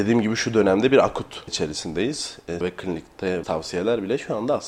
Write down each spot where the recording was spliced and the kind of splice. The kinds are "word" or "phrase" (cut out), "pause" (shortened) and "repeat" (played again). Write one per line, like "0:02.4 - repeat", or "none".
0:01.5 - word
0:02.6 - word
0:03.4 - word